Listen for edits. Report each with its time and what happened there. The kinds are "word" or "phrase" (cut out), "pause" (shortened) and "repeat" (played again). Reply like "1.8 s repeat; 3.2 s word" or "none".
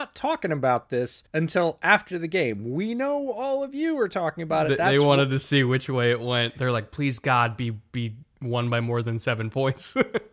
1.3 s pause